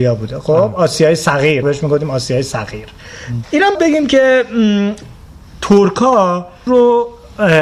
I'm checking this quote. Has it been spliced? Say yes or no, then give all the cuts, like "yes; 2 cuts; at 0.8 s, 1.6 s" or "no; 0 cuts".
yes; 4 cuts; at 1.6 s, 3.4 s, 3.7 s, 6.7 s